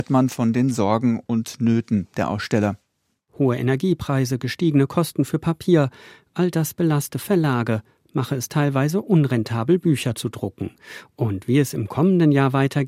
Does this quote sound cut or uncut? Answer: uncut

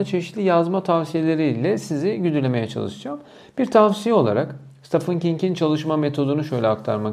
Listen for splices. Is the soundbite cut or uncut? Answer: uncut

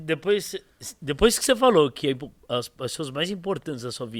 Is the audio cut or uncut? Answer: uncut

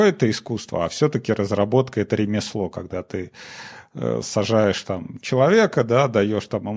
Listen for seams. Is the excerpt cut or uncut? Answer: uncut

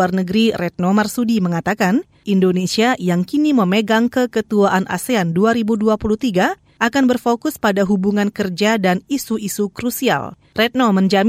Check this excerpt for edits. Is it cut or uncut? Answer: uncut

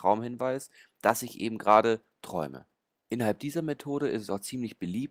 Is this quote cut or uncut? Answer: cut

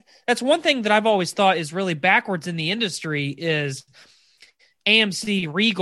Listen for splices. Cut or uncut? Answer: uncut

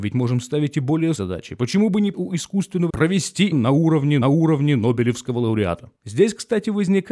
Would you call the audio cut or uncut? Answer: cut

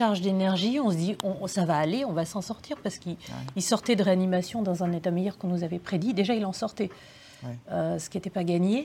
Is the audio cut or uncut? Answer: uncut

